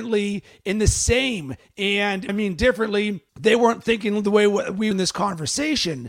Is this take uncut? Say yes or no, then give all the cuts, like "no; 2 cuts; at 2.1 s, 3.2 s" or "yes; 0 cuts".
no; 3 cuts; at 2.3 s, 3.3 s, 4.9 s